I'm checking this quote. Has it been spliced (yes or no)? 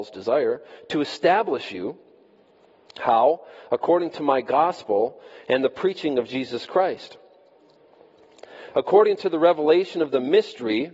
no